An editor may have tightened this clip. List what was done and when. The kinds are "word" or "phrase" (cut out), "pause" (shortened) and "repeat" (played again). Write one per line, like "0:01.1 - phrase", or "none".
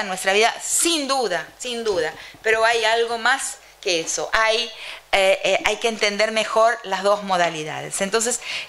none